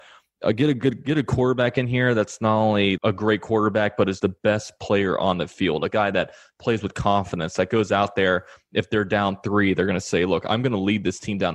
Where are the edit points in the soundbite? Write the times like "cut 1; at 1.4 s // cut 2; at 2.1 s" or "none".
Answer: cut 1; at 3.0 s // cut 2; at 4.2 s